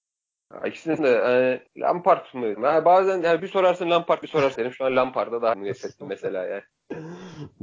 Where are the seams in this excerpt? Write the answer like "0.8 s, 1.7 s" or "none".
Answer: 1.0 s, 1.7 s, 2.5 s, 3.4 s, 4.2 s, 4.6 s, 5.5 s